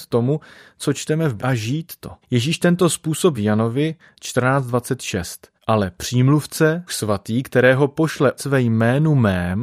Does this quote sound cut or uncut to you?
cut